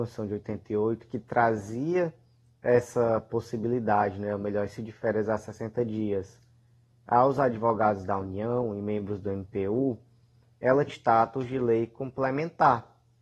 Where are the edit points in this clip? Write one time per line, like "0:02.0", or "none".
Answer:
0:04.8
0:10.9